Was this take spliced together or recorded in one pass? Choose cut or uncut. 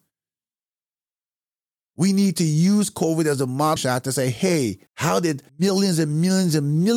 cut